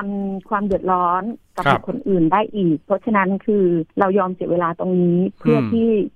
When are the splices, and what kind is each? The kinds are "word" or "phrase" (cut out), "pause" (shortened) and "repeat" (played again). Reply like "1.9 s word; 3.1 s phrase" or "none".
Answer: 3.9 s pause